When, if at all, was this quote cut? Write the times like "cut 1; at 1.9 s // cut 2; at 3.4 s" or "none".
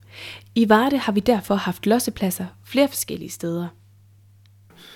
none